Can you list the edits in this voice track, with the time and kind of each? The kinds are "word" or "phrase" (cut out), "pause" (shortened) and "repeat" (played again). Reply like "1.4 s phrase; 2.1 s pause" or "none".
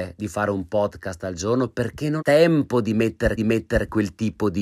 2.2 s word; 3.4 s repeat